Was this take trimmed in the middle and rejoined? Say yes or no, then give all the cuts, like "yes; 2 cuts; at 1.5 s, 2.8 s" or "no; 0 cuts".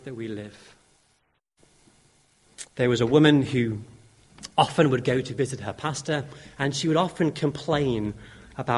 yes; 1 cut; at 2.7 s